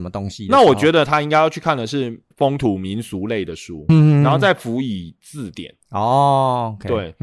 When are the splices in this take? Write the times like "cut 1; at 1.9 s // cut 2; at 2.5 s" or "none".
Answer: cut 1; at 2.3 s // cut 2; at 3.9 s